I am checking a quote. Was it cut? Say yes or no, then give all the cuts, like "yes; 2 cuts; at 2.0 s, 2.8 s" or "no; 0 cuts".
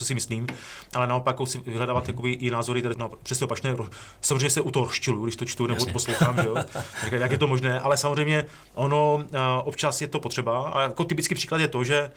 yes; 1 cut; at 2.9 s